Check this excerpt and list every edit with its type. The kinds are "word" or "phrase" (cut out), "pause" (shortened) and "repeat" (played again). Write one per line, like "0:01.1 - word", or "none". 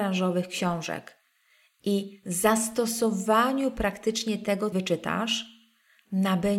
0:04.7 - phrase